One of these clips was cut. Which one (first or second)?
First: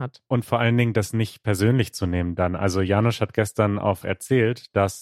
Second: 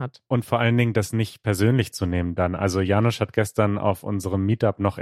first